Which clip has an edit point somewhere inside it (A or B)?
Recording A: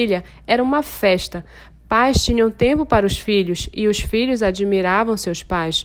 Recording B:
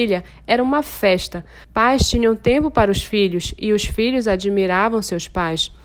B